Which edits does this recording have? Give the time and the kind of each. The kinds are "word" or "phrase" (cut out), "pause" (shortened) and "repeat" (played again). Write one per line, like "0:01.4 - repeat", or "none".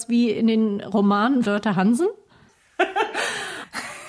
0:01.4 - word